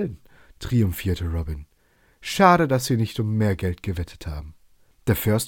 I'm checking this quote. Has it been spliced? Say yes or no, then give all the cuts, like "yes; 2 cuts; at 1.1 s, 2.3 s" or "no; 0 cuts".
no; 0 cuts